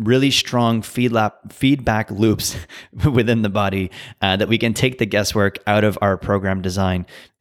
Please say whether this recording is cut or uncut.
uncut